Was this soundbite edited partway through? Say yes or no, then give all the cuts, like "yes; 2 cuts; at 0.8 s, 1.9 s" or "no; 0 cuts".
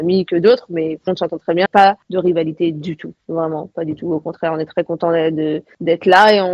yes; 2 cuts; at 1.1 s, 1.7 s